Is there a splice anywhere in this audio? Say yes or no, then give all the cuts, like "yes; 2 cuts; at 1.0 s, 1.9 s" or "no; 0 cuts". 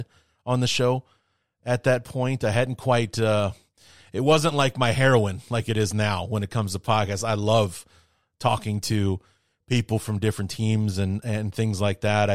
no; 0 cuts